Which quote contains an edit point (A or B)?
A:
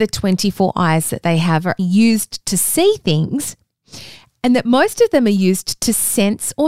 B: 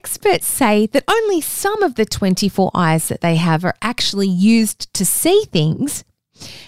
A